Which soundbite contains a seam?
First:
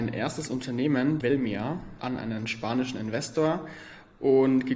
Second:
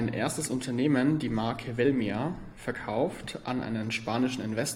first; 2 cuts; at 1.2 s, 2.0 s

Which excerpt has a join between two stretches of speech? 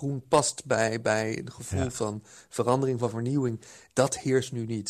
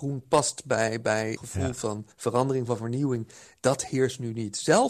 second; 2 cuts; at 1.4 s, 2.1 s

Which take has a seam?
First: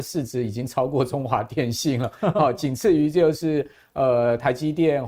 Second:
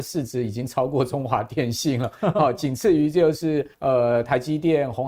second; 1 cut; at 3.7 s

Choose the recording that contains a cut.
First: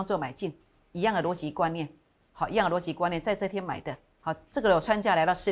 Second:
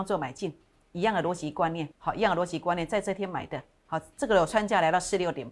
second; 1 cut; at 1.9 s

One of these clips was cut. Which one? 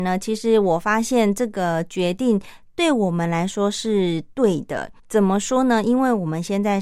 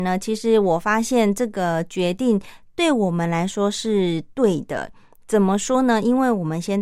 first; 1 cut; at 5.0 s

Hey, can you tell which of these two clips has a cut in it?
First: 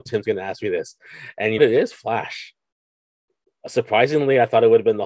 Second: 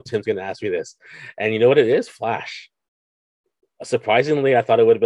first; 1 cut; at 1.6 s

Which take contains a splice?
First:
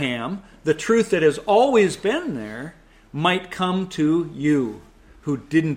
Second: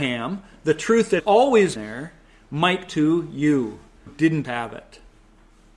second; 5 cuts; at 1.2 s, 1.8 s, 2.9 s, 4.1 s, 4.4 s

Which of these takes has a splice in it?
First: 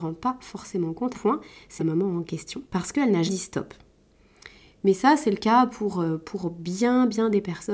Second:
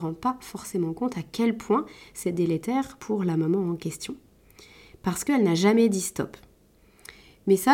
first; 4 cuts; at 1.1 s, 1.8 s, 2.7 s, 3.3 s

